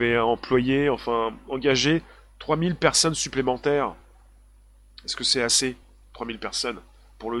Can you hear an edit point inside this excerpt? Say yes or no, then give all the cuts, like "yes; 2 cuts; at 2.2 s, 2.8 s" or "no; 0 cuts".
no; 0 cuts